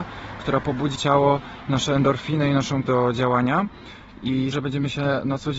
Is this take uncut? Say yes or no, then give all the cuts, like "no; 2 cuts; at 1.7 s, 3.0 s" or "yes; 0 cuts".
no; 3 cuts; at 1.0 s, 2.8 s, 4.5 s